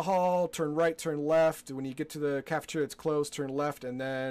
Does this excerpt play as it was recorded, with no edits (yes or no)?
yes